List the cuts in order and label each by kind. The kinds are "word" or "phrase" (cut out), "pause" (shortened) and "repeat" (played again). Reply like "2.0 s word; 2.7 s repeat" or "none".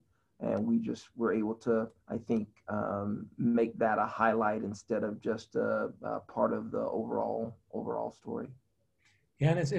2.0 s pause